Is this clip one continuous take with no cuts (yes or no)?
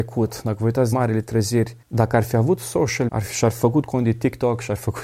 no